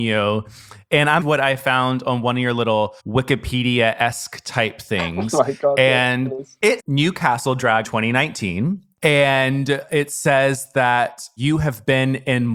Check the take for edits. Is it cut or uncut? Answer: cut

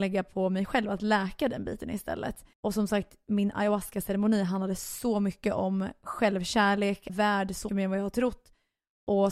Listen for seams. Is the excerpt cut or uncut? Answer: cut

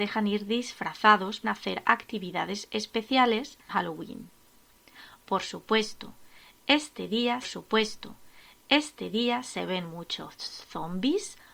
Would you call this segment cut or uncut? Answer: cut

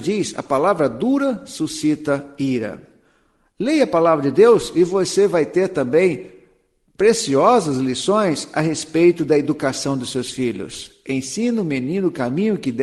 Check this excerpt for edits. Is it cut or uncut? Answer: uncut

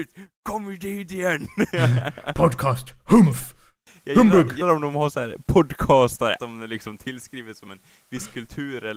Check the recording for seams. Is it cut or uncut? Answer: cut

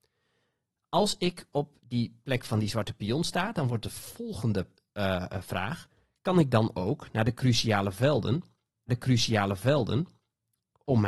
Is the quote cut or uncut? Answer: cut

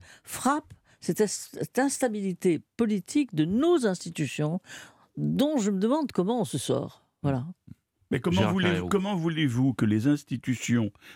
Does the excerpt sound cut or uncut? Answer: uncut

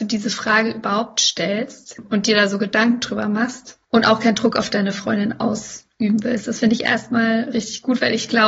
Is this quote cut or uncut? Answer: cut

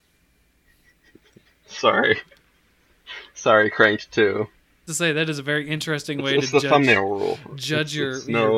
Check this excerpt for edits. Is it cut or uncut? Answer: cut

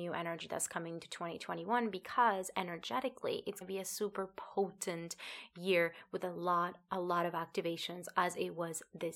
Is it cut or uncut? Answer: cut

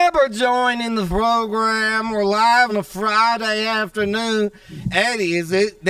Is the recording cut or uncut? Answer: cut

